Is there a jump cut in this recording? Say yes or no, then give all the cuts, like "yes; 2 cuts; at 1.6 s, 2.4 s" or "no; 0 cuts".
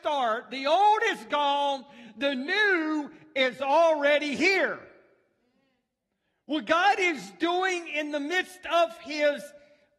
no; 0 cuts